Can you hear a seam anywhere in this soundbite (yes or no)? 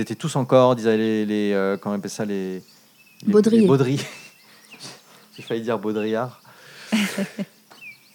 no